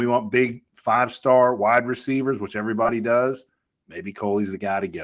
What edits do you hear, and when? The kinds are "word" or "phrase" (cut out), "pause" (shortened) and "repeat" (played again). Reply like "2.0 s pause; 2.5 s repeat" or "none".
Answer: none